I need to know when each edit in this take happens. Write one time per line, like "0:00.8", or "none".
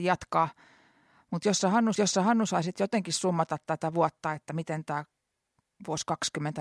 0:01.9